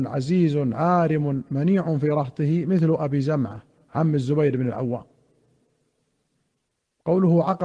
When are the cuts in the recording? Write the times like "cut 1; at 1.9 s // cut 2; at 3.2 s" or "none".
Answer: none